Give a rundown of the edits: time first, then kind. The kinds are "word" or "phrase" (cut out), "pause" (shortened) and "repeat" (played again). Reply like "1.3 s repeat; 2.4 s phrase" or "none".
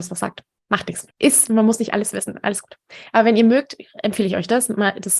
1.1 s pause